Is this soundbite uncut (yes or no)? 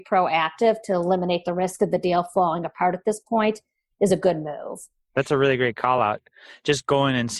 yes